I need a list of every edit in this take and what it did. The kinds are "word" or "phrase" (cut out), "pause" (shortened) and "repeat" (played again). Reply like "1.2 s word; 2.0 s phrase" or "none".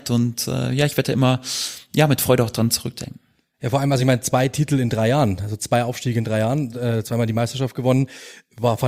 none